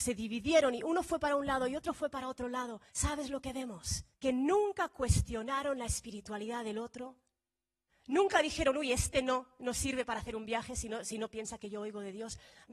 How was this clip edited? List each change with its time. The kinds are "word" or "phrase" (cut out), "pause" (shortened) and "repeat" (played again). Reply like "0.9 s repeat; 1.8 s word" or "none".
2.9 s pause; 4.1 s pause